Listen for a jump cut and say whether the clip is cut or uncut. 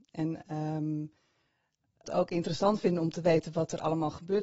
cut